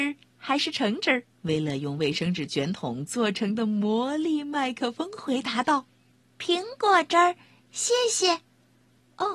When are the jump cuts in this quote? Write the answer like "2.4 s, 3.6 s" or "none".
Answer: 1.3 s, 5.9 s